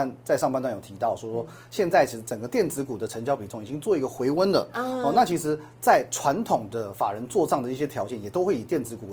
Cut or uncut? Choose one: uncut